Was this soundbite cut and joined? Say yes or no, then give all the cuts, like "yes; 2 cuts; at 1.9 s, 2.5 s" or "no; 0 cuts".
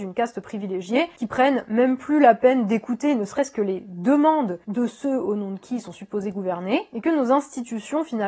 no; 0 cuts